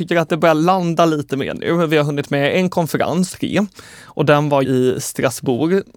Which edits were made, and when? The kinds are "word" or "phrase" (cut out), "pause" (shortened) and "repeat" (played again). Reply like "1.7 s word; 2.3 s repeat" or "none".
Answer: 3.3 s word; 4.6 s word

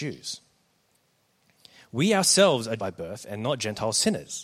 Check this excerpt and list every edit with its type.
2.8 s word

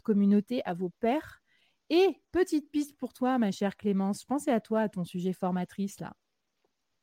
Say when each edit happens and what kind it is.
2.2 s pause

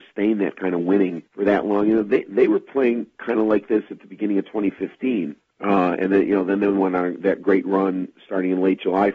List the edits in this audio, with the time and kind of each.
1.3 s pause; 5.4 s pause

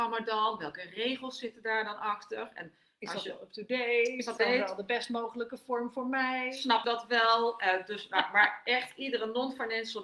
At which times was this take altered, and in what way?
4.4 s phrase; 6.8 s word

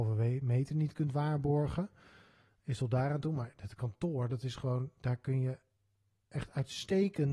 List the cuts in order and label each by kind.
none

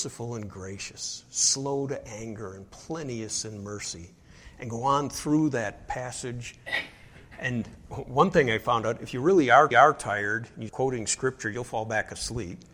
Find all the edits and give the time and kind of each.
9.7 s repeat; 10.7 s word

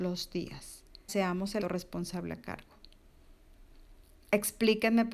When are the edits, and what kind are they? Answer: 1.1 s word; 1.6 s word

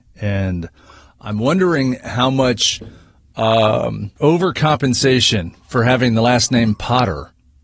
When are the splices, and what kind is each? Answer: 4.2 s pause

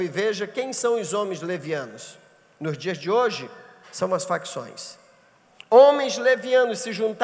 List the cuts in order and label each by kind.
none

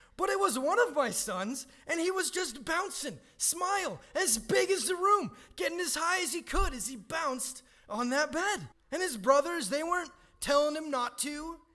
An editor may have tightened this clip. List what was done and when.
8.7 s pause

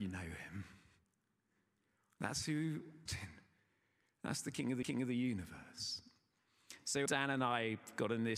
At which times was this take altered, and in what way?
3.1 s phrase; 4.8 s repeat; 7.1 s word

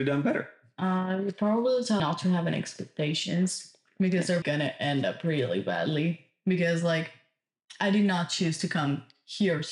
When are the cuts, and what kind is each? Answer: 2.0 s word; 4.4 s word

